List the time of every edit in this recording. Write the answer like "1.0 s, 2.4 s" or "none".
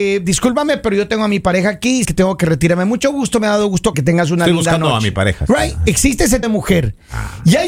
2.0 s, 3.9 s, 6.4 s